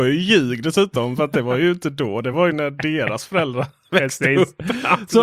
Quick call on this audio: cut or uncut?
uncut